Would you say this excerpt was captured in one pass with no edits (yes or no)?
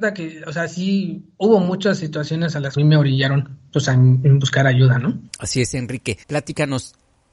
no